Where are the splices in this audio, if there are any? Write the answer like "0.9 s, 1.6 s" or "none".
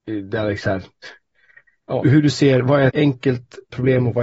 2.0 s, 2.9 s